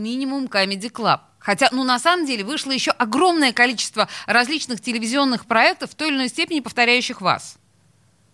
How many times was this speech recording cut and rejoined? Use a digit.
0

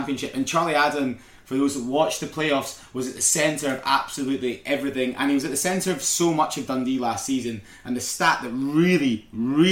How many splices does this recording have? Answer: 0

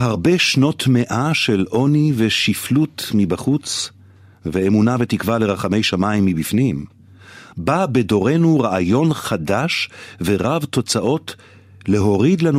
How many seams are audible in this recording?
0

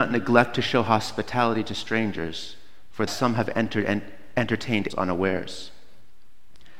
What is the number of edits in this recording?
2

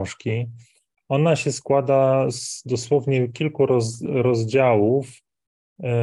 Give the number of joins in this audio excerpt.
0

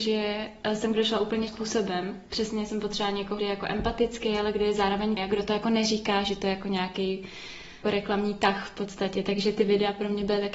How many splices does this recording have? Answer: 5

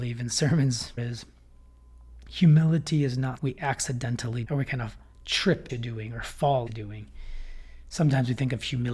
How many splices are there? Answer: 5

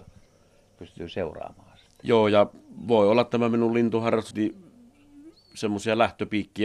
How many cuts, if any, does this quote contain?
1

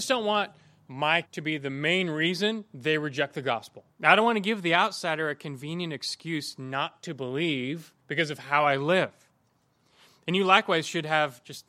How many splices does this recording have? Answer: 3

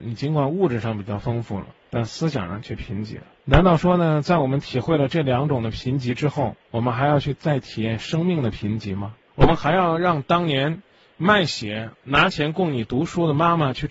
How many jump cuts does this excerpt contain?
0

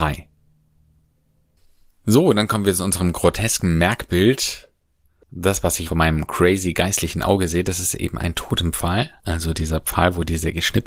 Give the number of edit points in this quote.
1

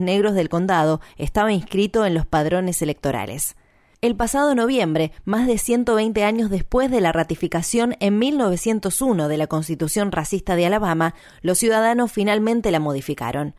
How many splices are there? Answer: 0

